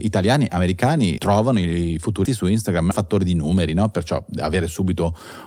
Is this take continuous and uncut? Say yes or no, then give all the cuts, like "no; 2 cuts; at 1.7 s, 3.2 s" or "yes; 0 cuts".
no; 3 cuts; at 1.2 s, 2.3 s, 2.9 s